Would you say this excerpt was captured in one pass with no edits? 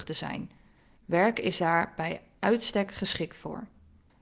yes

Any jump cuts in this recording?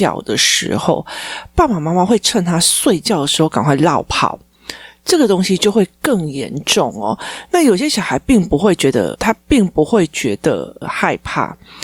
yes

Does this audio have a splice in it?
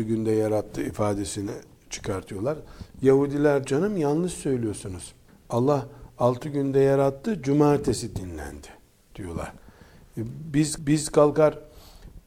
yes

